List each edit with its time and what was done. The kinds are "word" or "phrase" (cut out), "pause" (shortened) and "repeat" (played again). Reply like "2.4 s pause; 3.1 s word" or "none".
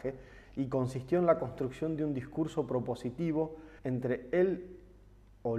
3.8 s pause